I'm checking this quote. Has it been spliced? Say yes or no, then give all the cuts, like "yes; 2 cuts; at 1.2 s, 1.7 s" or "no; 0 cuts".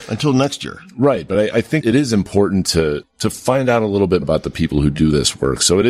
yes; 3 cuts; at 1.8 s, 3.0 s, 4.2 s